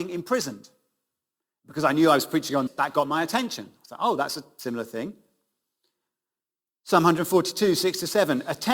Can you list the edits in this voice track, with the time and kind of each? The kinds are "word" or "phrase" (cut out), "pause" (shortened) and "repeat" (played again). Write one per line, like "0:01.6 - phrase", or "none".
0:02.7 - word